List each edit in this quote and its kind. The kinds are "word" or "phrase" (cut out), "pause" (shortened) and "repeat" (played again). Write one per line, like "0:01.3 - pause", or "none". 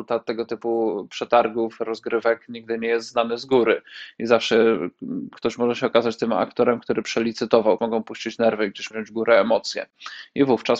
0:07.8 - word
0:08.9 - word